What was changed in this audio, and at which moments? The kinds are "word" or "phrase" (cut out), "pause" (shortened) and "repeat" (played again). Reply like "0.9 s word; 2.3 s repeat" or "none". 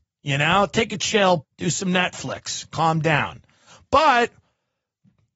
1.4 s word